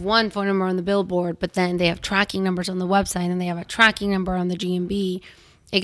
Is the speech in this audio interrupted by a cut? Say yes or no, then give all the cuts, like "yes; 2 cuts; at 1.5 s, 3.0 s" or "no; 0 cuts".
no; 0 cuts